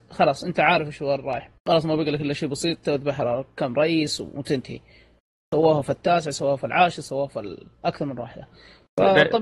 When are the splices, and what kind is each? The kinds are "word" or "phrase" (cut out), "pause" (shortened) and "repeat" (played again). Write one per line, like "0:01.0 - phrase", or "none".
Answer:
0:01.6 - pause
0:07.7 - pause

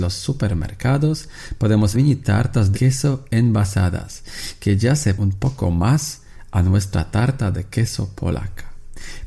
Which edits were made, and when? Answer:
0:01.9 - word
0:02.7 - word
0:05.2 - word

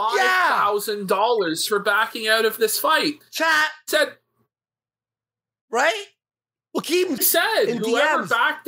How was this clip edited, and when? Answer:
0:07.2 - word

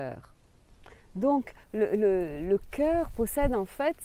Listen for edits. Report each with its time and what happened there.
none

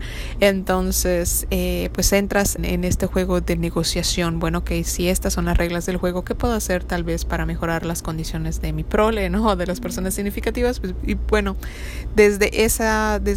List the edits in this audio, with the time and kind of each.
0:02.6 - word

